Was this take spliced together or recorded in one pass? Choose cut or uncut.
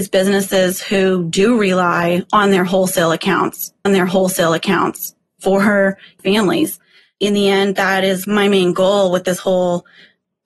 cut